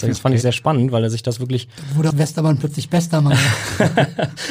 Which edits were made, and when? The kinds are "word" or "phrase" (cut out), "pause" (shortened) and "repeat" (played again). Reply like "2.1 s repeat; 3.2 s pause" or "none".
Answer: 2.1 s word